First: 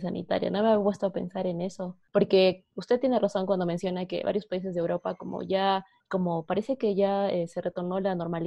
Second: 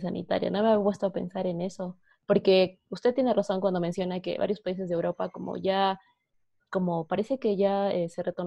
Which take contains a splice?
first; 2 cuts; at 2.1 s, 6.0 s

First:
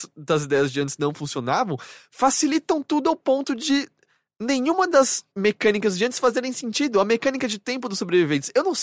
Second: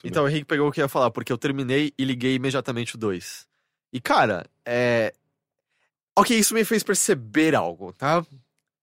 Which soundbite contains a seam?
first; 1 cut; at 5.3 s

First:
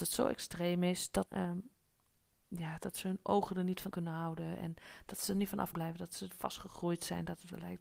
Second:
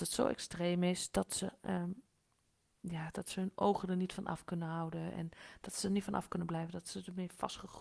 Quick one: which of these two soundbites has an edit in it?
first; 4 cuts; at 1.3 s, 3.9 s, 5.7 s, 6.3 s

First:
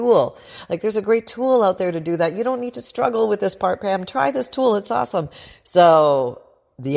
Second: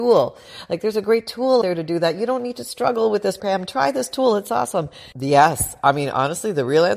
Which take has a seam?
second; 3 cuts; at 1.6 s, 3.4 s, 5.1 s

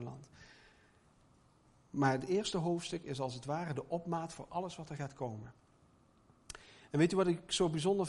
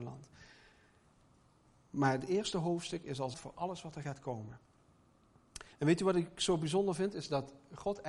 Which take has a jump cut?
second; 2 cuts; at 3.3 s, 5.7 s

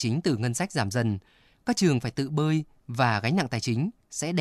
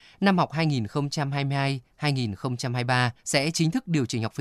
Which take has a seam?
second; 1 cut; at 3.2 s

